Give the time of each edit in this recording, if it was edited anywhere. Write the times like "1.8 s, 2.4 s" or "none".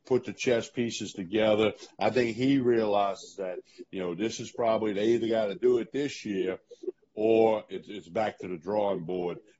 none